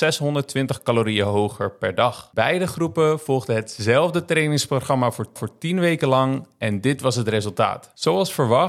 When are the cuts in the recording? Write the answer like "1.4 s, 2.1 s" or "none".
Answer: 5.4 s

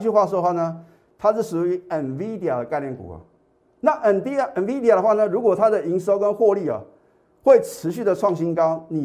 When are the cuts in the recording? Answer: none

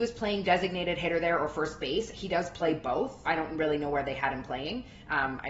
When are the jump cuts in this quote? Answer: 3.2 s

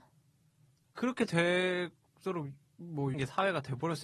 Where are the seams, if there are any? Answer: 3.1 s

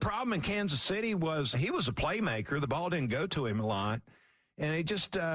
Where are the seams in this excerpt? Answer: 1.5 s

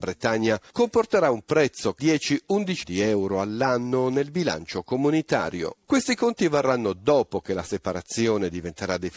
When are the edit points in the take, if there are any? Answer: 2.0 s, 2.8 s

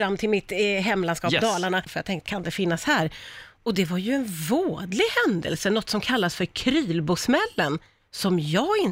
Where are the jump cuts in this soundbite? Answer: 2.3 s

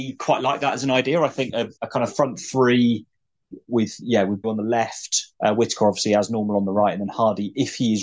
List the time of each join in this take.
1.8 s, 4.4 s, 5.3 s

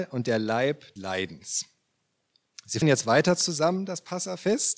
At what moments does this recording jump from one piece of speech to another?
1.0 s, 2.8 s

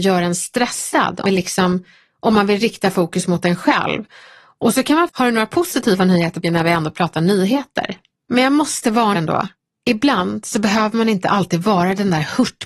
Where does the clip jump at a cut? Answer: 1.2 s, 5.1 s, 6.4 s, 9.1 s

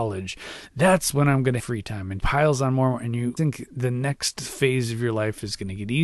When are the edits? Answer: 1.6 s, 2.2 s, 3.4 s

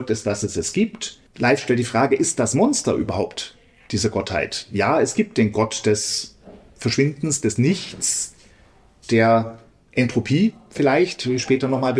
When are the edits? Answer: none

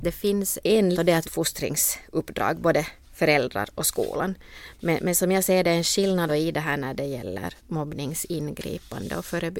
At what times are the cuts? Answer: 0.9 s, 1.2 s, 3.0 s, 6.3 s, 7.6 s

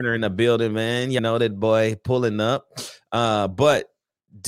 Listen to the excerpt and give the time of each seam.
1.2 s

